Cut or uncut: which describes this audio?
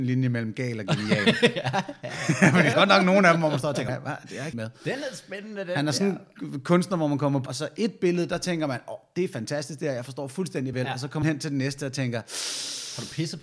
cut